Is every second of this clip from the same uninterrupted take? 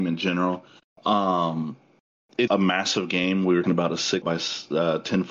no; 3 cuts; at 2.5 s, 3.6 s, 4.2 s

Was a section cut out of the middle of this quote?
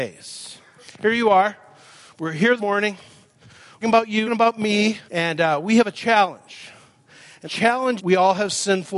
yes; 6 cuts; at 2.6 s, 3.8 s, 4.2 s, 5.1 s, 7.4 s, 8.0 s

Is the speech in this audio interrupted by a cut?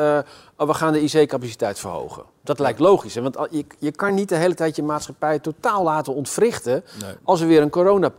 no; 0 cuts

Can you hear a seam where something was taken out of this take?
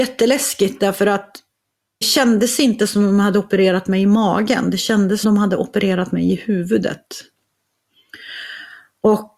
yes; 2 cuts; at 2.0 s, 5.2 s

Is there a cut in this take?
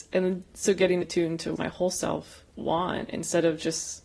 yes; 3 cuts; at 1.0 s, 1.6 s, 2.5 s

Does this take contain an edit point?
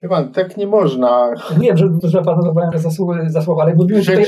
yes; 3 cuts; at 1.6 s, 2.0 s, 2.7 s

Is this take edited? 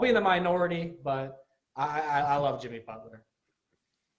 no; 0 cuts

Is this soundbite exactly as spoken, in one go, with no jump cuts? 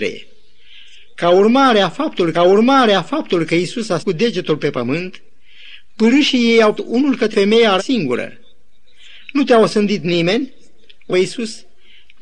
no; 6 cuts; at 2.3 s, 4.0 s, 6.8 s, 7.3 s, 7.8 s, 11.1 s

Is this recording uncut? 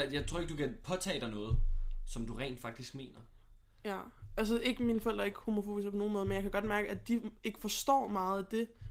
yes; 0 cuts

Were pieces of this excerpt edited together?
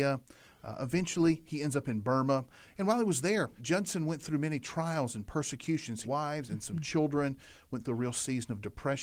yes; 2 cuts; at 3.6 s, 6.0 s

